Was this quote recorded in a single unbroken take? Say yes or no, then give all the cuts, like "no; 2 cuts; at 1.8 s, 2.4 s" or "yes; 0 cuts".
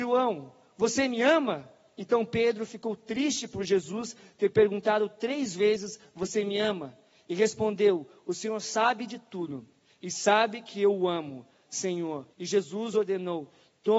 no; 1 cut; at 12.3 s